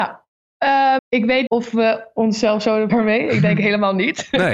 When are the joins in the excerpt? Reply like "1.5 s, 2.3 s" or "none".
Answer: 1.0 s, 1.5 s, 2.9 s